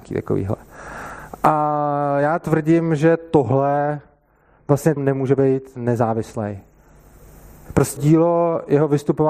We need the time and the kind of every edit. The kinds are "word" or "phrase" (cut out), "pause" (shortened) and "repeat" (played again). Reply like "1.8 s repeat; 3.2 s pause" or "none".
5.0 s phrase; 8.0 s word